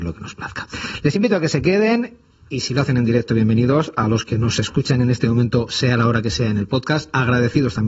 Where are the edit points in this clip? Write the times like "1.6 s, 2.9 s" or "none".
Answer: none